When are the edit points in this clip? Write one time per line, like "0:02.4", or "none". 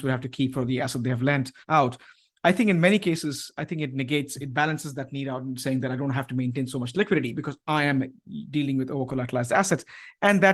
0:01.6